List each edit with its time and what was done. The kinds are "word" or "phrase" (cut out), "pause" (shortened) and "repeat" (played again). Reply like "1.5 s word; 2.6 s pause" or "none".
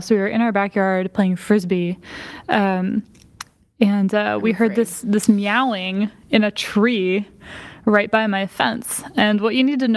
none